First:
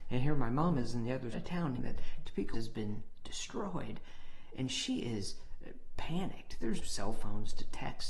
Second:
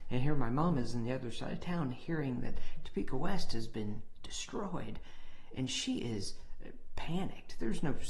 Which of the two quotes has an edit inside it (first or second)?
first